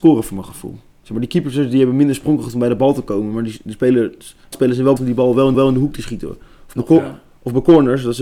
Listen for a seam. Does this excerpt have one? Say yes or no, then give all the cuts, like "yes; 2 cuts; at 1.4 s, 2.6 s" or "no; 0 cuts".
yes; 3 cuts; at 4.5 s, 5.0 s, 5.5 s